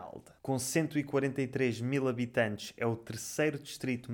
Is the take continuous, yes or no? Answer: yes